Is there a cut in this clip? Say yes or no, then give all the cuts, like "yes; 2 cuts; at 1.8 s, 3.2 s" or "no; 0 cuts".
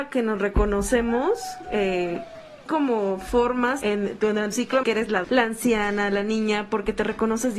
yes; 5 cuts; at 2.7 s, 3.8 s, 4.5 s, 4.8 s, 5.2 s